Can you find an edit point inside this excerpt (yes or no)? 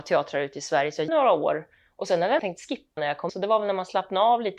yes